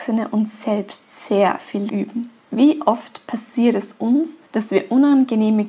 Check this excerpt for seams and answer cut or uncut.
cut